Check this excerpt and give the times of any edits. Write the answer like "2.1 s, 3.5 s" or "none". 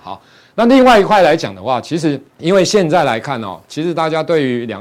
2.3 s